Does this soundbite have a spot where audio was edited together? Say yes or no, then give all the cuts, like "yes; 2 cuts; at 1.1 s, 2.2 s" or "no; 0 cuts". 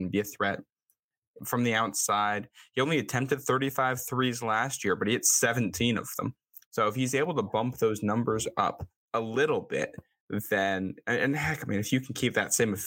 yes; 2 cuts; at 1.4 s, 9.0 s